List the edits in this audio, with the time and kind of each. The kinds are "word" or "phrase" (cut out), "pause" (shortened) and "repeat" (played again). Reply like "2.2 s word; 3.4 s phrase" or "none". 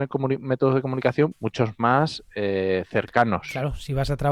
1.3 s phrase